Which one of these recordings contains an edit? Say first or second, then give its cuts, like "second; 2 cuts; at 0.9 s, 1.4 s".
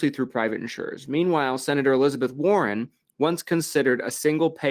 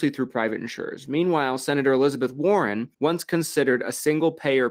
second; 1 cut; at 2.9 s